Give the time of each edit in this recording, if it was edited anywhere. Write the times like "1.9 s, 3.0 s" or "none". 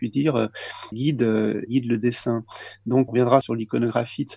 0.9 s, 1.7 s, 3.1 s, 3.4 s

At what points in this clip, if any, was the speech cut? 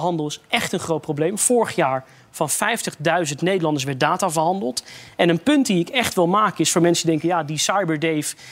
none

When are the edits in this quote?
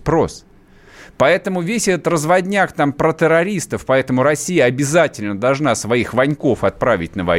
none

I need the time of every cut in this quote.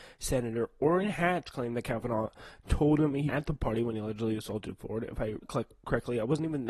2.7 s, 3.3 s, 5.4 s

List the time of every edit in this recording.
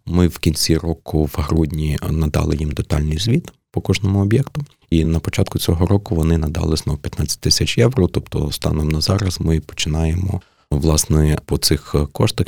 none

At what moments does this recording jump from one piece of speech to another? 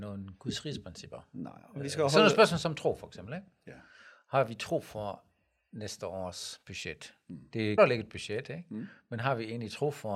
7.8 s

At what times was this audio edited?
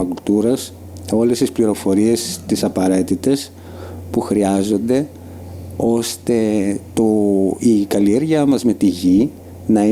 none

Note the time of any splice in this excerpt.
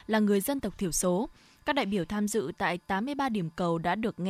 none

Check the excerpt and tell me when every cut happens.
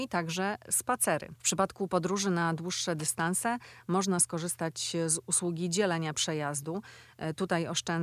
none

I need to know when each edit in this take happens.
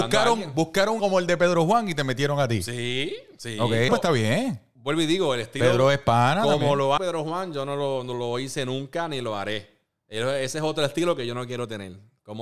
1.0 s, 3.9 s, 7.0 s

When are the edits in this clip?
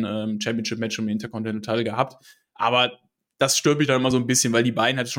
none

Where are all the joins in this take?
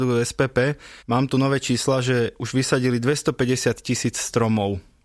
1.0 s

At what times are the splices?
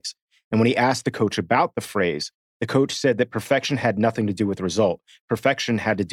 none

